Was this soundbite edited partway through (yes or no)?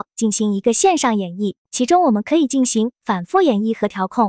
yes